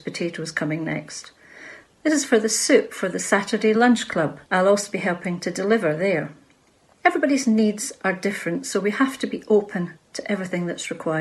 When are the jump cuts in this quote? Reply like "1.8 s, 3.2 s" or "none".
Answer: 4.4 s